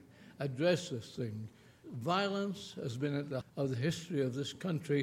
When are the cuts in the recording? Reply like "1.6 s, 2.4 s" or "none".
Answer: 1.8 s, 3.4 s

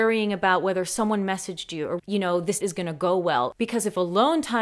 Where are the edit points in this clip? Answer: 2.0 s, 2.6 s

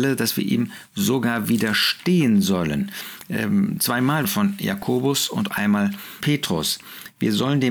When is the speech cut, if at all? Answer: 4.2 s, 5.5 s, 6.2 s

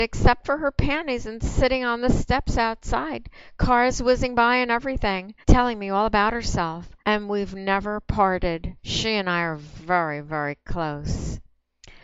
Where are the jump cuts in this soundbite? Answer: 5.4 s, 7.0 s, 8.8 s

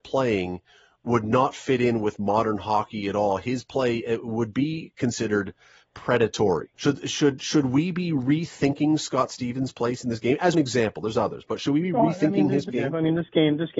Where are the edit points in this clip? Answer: 6.7 s, 10.5 s, 12.7 s

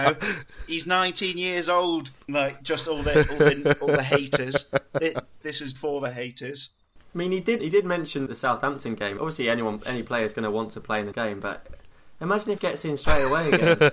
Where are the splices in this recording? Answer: 2.3 s, 5.4 s, 5.7 s, 7.6 s, 8.3 s, 9.2 s, 11.1 s, 12.6 s

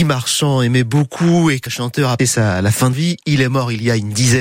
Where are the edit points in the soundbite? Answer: 1.7 s, 2.2 s, 2.9 s

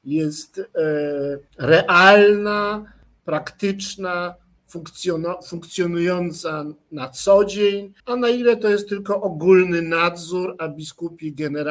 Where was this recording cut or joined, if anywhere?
1.5 s, 8.0 s

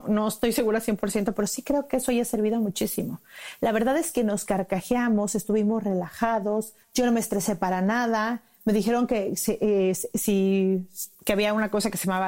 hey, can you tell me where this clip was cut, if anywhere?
6.8 s, 11.1 s

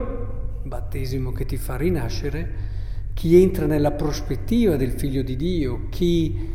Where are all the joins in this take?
none

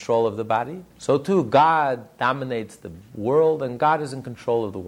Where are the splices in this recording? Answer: 0.9 s

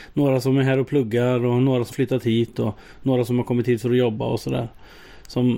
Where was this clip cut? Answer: 1.9 s

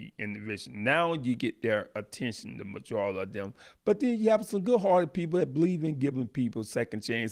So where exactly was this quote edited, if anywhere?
none

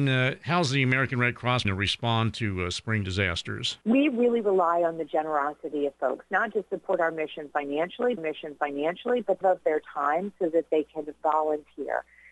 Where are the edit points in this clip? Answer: 1.6 s, 3.8 s, 6.5 s, 8.2 s, 9.4 s

